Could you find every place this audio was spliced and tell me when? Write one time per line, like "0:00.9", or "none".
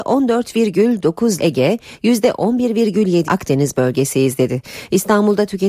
0:01.4
0:03.2